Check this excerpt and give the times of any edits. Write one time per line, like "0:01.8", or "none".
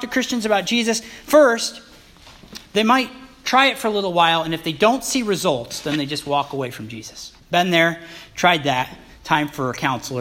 0:07.4